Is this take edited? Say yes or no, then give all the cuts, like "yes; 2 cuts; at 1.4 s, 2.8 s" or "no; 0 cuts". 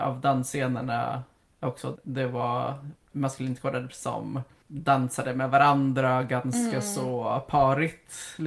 yes; 3 cuts; at 1.9 s, 3.1 s, 3.9 s